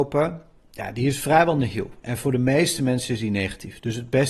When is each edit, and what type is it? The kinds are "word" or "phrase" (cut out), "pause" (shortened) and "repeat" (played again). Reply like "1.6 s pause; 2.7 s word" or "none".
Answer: none

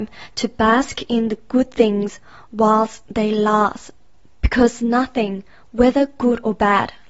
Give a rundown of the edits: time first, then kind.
none

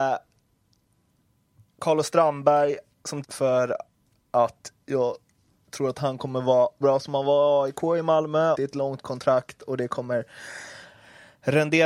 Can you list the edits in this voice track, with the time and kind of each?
3.2 s word; 6.8 s word; 8.5 s word

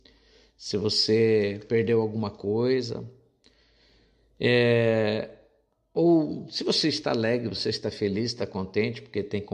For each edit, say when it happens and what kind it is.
none

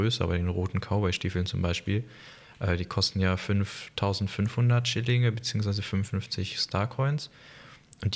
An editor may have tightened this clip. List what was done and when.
none

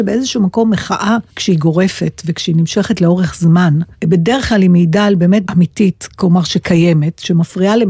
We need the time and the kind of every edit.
1.3 s pause; 3.9 s pause; 5.4 s word

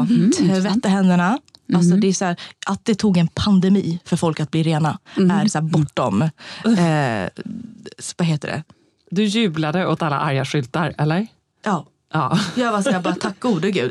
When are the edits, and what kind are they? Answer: none

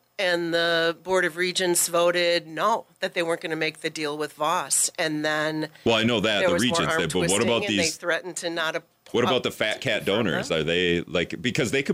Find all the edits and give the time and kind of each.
none

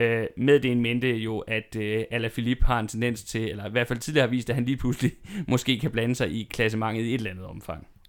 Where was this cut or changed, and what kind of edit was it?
none

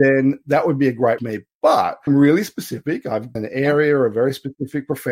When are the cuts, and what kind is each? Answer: 1.2 s word; 2.1 s phrase; 3.4 s word

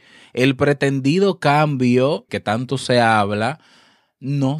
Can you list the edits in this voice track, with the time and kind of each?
2.3 s word

